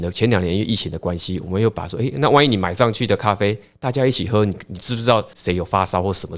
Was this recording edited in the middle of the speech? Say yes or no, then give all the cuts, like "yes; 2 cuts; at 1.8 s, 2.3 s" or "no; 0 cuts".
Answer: no; 0 cuts